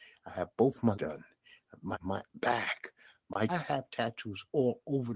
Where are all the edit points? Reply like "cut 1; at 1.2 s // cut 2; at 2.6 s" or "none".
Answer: cut 1; at 0.9 s // cut 2; at 1.9 s // cut 3; at 2.3 s // cut 4; at 3.5 s